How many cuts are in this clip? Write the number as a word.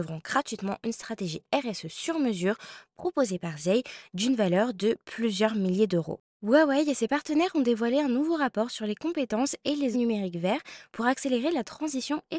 one